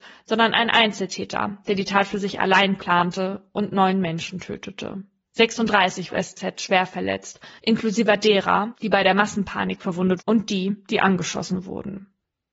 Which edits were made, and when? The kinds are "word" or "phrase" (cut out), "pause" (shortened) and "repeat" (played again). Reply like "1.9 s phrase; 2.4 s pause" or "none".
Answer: 6.1 s phrase; 7.6 s pause; 10.2 s word